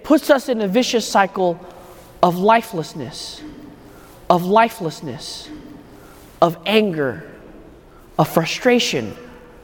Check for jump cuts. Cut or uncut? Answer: cut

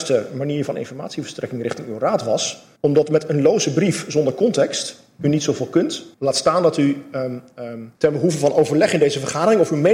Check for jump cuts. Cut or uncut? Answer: cut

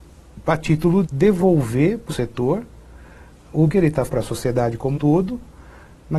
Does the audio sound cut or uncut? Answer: cut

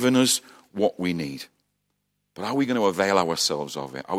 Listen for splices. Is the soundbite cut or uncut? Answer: uncut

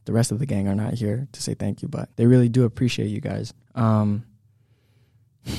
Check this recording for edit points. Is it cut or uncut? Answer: cut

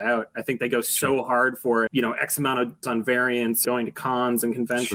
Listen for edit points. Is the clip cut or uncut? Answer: cut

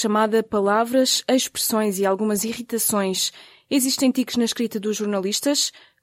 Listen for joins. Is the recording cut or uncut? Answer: uncut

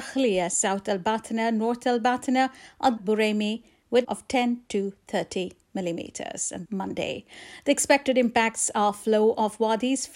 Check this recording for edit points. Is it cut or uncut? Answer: cut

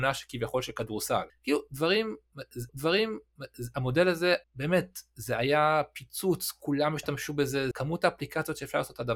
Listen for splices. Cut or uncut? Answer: cut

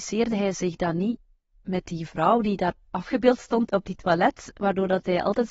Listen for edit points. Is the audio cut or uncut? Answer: uncut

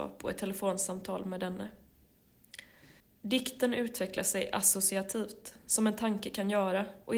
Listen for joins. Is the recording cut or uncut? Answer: cut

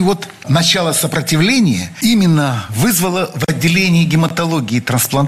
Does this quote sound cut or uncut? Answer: uncut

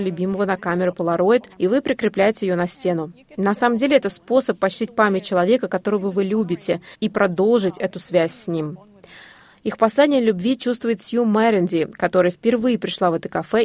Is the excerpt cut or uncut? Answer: cut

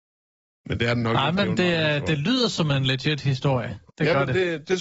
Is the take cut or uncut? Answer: cut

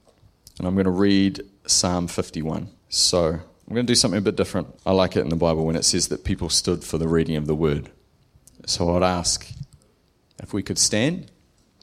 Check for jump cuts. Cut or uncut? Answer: cut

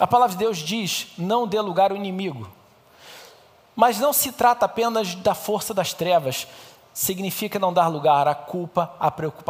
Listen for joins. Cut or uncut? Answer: uncut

